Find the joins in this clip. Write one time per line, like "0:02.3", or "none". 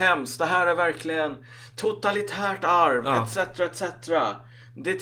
none